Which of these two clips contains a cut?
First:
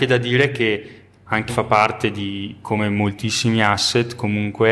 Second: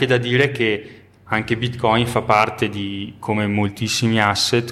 first; 1 cut; at 1.5 s

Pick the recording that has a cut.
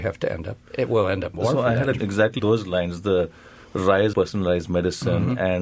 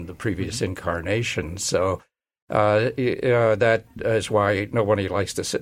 first; 4 cuts; at 1.3 s, 2.0 s, 2.4 s, 4.1 s

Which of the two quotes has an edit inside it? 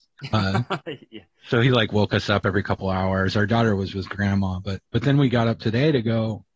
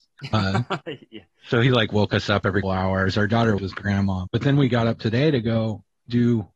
second; 3 cuts; at 2.6 s, 3.6 s, 4.3 s

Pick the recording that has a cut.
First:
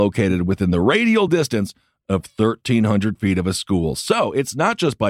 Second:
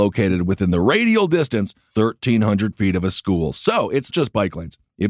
second; 2 cuts; at 1.9 s, 4.1 s

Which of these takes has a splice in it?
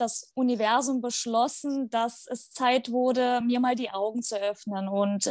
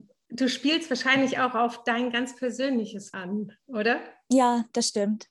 second; 1 cut; at 3.1 s

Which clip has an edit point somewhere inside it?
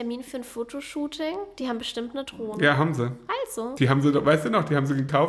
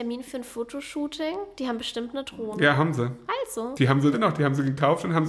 second; 1 cut; at 4.1 s

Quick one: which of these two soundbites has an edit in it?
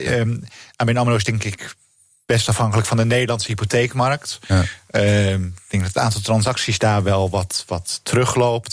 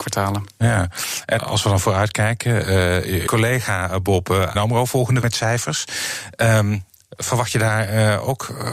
second; 4 cuts; at 1.4 s, 3.3 s, 4.5 s, 5.2 s

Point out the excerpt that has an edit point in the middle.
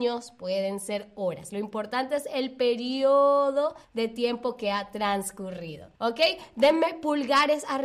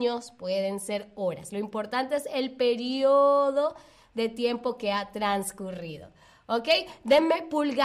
first; 2 cuts; at 3.8 s, 6.0 s

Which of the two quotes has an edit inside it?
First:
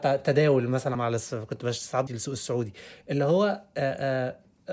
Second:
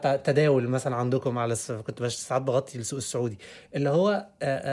first; 2 cuts; at 0.9 s, 2.1 s

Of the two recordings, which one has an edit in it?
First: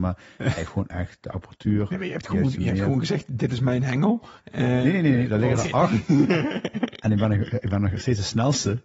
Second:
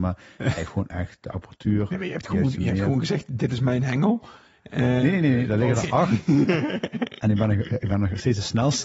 first; 1 cut; at 4.4 s

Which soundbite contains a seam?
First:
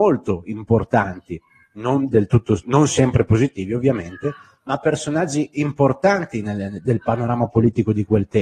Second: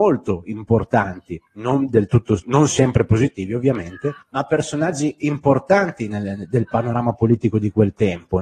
second; 2 cuts; at 1.5 s, 4.2 s

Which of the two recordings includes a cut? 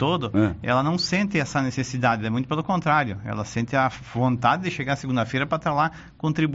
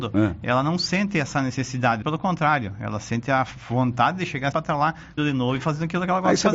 second; 3 cuts; at 2.0 s, 4.5 s, 5.2 s

